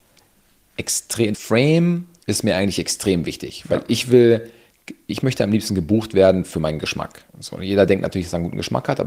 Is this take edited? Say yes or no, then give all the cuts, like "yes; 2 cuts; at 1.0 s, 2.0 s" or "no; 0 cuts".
yes; 2 cuts; at 1.3 s, 7.3 s